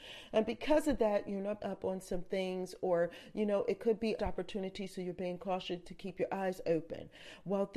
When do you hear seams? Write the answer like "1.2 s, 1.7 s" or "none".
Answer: 1.6 s, 4.2 s